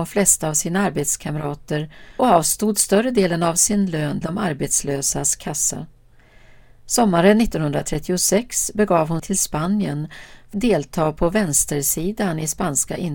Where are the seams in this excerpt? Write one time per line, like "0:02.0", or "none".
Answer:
0:02.2
0:04.2
0:09.2
0:10.5

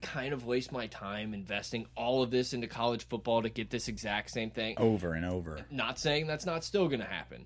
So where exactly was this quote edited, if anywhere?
none

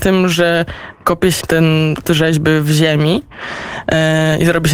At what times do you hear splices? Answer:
0:01.4
0:02.0

